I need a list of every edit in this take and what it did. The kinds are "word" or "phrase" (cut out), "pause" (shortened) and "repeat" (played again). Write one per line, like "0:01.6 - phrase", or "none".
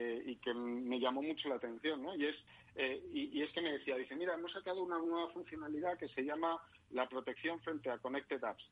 none